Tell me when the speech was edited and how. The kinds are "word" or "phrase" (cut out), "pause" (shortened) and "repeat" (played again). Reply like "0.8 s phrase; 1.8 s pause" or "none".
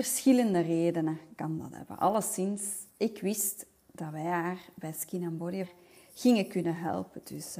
2.9 s pause; 5.6 s word